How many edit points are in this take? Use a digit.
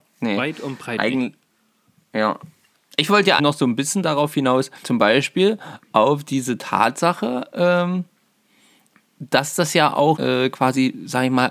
3